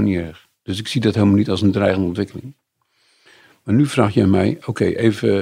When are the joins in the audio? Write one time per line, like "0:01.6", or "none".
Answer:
none